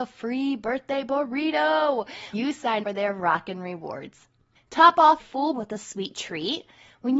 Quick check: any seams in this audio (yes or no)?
yes